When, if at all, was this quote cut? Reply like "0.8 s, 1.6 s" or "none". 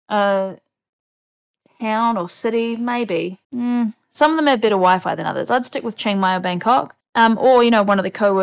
3.4 s, 7.0 s